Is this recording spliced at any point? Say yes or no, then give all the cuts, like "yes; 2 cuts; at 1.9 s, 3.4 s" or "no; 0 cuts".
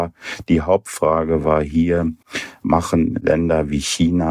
no; 0 cuts